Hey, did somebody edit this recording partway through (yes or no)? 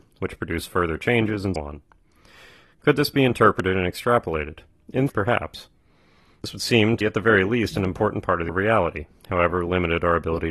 yes